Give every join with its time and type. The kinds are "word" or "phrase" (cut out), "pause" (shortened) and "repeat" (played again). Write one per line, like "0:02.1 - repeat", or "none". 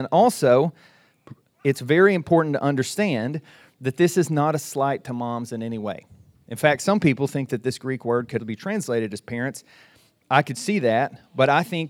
0:08.4 - word

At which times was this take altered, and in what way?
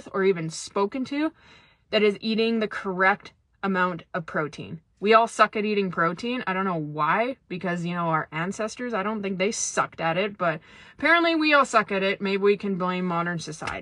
none

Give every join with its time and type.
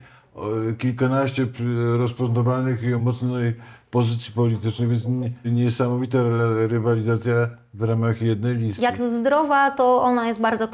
0:03.0 - word
0:05.4 - word
0:09.0 - phrase

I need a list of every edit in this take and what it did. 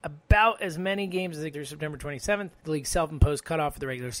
0:01.5 - word
0:02.6 - pause

